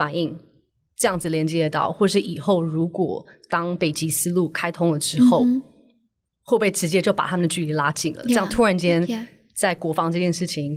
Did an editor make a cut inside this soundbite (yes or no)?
no